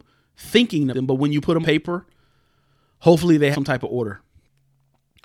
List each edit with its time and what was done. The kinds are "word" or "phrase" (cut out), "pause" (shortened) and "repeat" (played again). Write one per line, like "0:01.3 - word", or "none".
0:00.9 - word
0:01.6 - word
0:03.5 - word